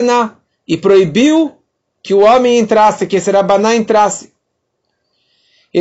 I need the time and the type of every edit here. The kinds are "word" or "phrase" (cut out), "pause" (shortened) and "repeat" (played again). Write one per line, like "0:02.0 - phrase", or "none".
none